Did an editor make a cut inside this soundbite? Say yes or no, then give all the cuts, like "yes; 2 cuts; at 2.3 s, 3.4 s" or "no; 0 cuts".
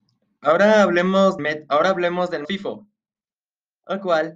yes; 2 cuts; at 1.4 s, 2.4 s